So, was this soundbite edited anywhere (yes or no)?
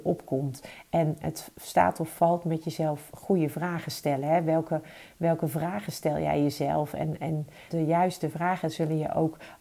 yes